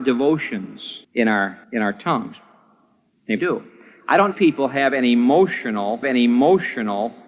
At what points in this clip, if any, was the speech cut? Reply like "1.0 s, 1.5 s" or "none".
1.0 s, 1.6 s, 3.4 s, 4.3 s, 6.0 s